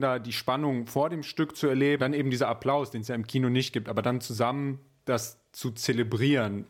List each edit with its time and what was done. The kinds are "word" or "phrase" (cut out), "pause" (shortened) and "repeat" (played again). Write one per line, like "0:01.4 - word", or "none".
0:02.0 - word